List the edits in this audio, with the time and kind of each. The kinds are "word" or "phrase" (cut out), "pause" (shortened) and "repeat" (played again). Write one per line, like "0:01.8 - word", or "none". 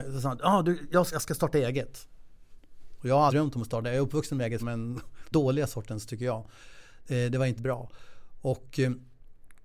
0:01.1 - word
0:03.3 - word
0:04.6 - word
0:05.3 - word
0:07.6 - word